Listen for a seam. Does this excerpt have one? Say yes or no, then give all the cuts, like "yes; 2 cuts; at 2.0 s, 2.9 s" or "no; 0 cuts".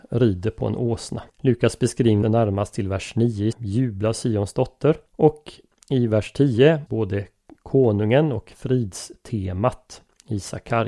yes; 5 cuts; at 1.3 s, 2.2 s, 3.5 s, 5.1 s, 6.9 s